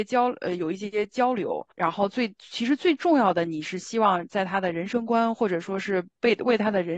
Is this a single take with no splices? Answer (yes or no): no